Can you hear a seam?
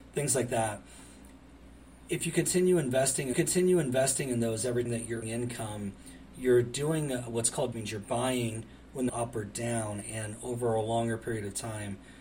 yes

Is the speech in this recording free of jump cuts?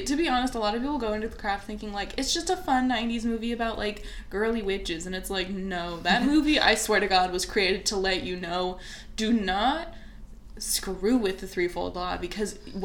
yes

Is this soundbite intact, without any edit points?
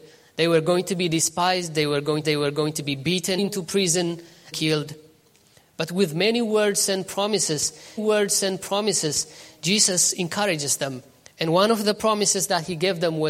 no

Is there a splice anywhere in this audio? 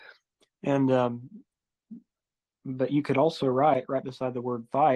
no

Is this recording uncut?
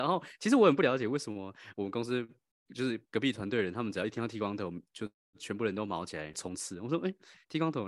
yes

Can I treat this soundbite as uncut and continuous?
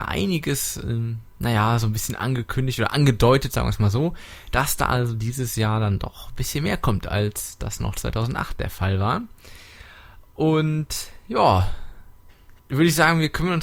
no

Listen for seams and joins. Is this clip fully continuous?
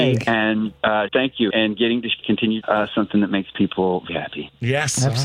no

